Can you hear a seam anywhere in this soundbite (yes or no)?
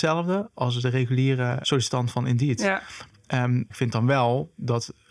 yes